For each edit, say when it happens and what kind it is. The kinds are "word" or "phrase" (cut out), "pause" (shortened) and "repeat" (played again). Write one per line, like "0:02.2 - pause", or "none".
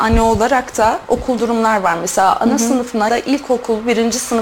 0:01.4 - word
0:03.1 - word